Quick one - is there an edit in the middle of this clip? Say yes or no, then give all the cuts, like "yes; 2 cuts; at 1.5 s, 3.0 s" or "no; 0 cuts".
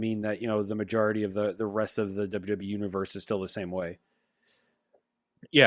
no; 0 cuts